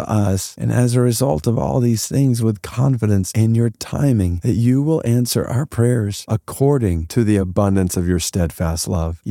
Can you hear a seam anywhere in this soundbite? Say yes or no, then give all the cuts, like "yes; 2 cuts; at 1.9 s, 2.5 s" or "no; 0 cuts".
no; 0 cuts